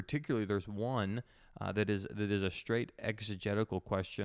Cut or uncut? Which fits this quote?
uncut